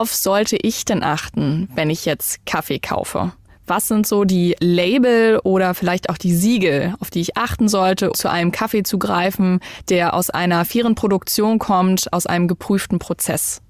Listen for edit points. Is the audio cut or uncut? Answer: cut